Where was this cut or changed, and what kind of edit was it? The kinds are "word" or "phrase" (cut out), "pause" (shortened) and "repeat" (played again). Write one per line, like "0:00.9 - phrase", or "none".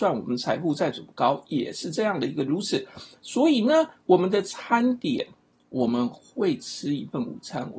none